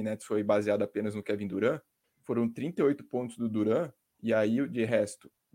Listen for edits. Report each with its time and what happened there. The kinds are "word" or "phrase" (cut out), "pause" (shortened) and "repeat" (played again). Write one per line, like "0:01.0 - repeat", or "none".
none